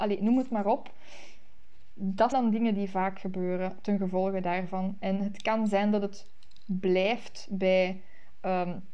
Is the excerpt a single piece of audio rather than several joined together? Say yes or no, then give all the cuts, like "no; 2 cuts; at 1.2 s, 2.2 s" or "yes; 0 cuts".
no; 1 cut; at 2.3 s